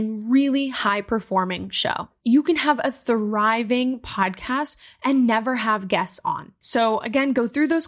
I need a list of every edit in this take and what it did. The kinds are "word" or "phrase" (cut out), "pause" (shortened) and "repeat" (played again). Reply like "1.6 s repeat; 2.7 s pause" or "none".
none